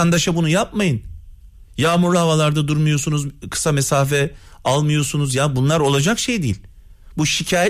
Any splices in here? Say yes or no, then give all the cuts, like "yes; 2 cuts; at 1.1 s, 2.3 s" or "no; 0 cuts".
no; 0 cuts